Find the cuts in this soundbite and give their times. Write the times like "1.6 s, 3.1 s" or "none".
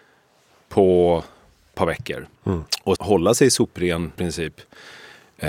1.7 s, 2.4 s, 3.0 s, 4.2 s